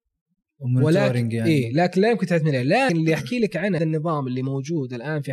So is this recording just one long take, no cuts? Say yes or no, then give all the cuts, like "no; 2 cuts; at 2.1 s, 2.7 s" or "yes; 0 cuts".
no; 2 cuts; at 2.9 s, 3.8 s